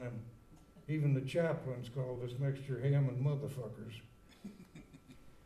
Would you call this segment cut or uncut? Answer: uncut